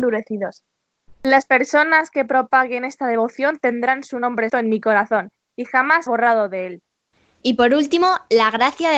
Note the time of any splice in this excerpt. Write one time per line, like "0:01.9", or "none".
0:04.5
0:06.1